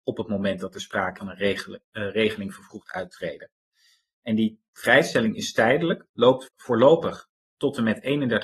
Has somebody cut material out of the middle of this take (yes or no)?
yes